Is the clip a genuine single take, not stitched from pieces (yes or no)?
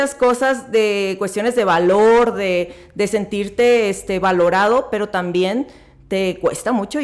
yes